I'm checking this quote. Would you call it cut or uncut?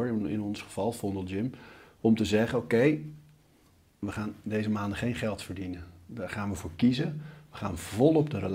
uncut